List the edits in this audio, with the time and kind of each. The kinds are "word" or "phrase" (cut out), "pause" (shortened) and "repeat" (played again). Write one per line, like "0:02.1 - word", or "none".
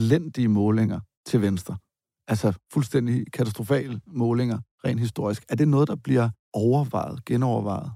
none